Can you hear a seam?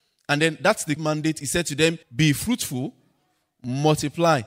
yes; 2 cuts; at 1.0 s, 2.0 s

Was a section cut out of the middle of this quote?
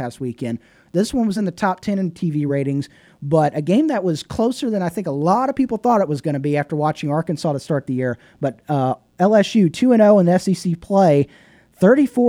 no; 0 cuts

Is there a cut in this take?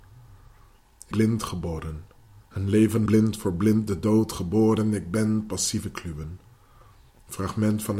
yes; 3 cuts; at 1.1 s, 2.4 s, 3.1 s

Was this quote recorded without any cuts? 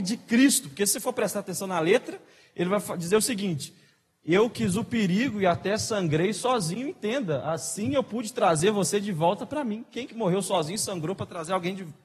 yes; 0 cuts

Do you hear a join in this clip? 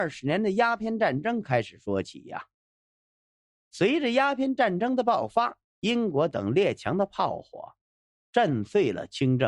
yes; 1 cut; at 5.7 s

